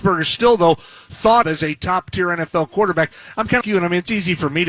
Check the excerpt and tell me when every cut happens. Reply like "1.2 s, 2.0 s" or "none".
1.4 s, 3.6 s